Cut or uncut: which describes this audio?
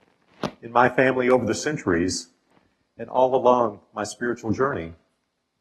uncut